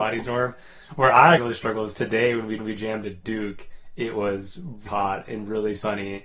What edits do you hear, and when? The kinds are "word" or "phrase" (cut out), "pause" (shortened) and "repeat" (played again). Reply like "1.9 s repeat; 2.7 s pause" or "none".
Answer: 1.4 s word; 2.6 s repeat; 4.9 s word